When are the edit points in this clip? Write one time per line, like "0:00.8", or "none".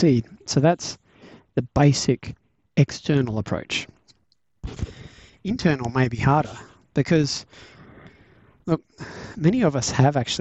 none